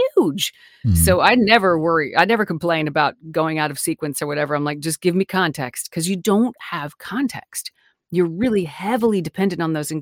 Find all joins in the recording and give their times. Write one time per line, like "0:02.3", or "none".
none